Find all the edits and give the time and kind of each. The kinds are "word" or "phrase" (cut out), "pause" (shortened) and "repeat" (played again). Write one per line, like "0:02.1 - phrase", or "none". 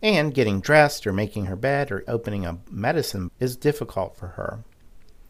0:02.1 - word
0:03.3 - word